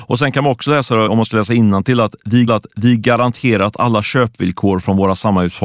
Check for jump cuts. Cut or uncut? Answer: cut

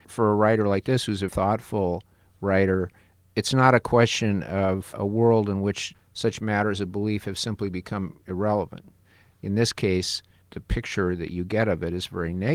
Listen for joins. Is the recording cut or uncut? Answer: cut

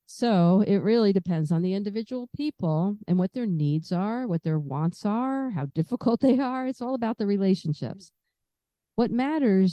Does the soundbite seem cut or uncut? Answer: uncut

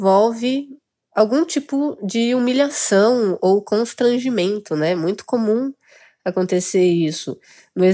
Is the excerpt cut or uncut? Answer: uncut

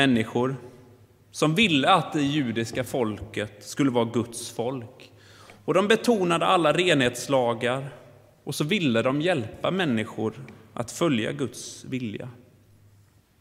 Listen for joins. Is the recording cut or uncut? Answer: uncut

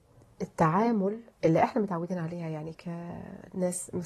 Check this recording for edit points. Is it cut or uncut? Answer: cut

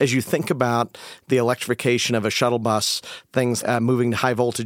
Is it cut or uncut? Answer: cut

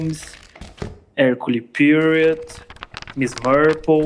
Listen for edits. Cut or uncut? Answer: uncut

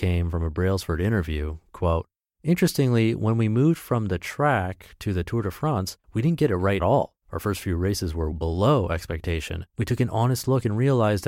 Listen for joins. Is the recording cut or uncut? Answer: cut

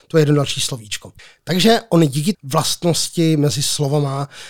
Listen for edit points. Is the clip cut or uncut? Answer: cut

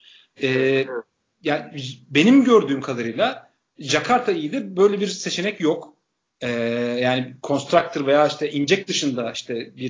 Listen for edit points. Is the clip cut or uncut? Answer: uncut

